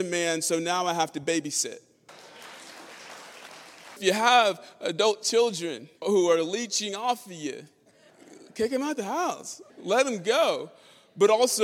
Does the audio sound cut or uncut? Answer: cut